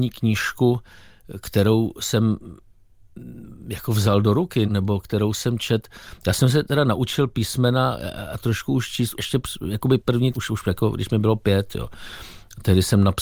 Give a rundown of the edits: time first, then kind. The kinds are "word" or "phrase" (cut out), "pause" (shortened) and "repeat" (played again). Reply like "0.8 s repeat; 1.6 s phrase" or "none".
4.7 s word; 9.2 s word; 10.0 s word; 10.3 s word